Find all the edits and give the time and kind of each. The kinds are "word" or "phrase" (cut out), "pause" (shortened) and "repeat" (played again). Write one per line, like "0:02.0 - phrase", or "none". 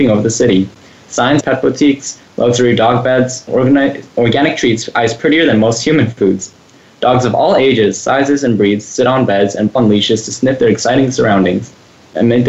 0:01.4 - word
0:03.5 - word
0:09.8 - word

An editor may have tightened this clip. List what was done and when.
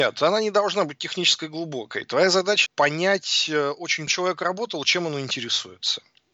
0:02.7 - phrase
0:04.1 - phrase

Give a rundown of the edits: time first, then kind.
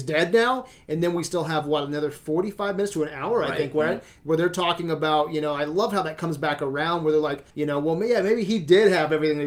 0:07.5 - pause

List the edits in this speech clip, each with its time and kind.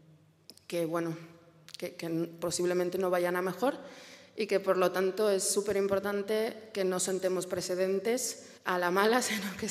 0:08.6 - pause

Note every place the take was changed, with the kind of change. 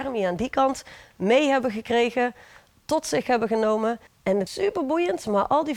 0:04.1 - pause
0:04.5 - word

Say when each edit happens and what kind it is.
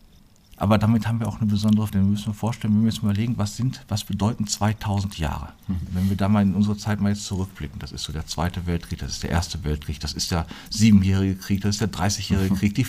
0:01.9 - word

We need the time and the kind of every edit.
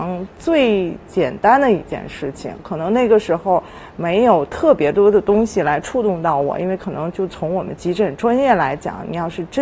none

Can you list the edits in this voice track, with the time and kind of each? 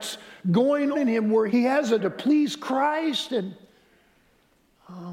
0:00.9 - word
0:01.5 - word
0:02.0 - word

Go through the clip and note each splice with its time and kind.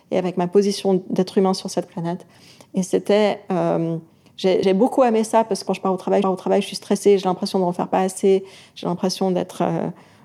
0:04.6 - word
0:05.7 - phrase
0:06.2 - repeat

